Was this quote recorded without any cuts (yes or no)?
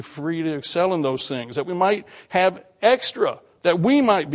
yes